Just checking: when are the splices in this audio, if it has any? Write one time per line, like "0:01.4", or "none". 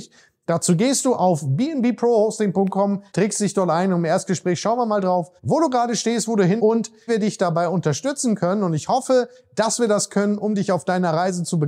0:03.1
0:05.4
0:06.6
0:07.1